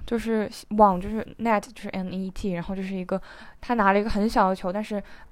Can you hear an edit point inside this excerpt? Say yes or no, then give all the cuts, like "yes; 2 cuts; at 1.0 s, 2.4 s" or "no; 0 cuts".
no; 0 cuts